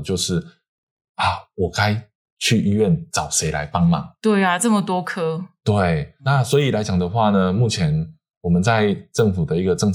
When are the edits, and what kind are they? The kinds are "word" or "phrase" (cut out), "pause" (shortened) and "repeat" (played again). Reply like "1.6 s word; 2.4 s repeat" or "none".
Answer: 6.2 s word

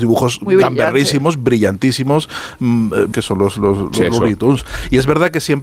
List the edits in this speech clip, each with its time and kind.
3.1 s word

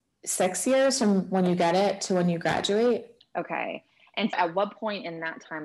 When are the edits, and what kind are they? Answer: 3.2 s pause; 4.3 s word

